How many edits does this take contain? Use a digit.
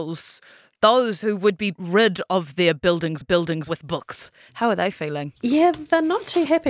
1